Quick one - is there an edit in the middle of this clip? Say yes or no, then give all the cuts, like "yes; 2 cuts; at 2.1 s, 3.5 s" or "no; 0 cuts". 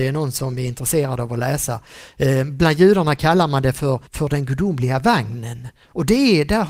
yes; 1 cut; at 4.1 s